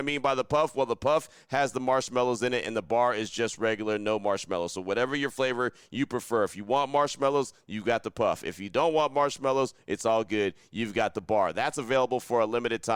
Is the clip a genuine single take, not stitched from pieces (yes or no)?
yes